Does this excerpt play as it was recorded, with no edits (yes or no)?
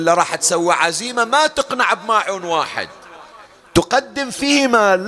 yes